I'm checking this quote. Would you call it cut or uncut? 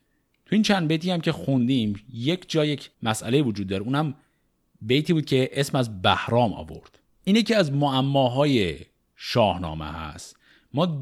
cut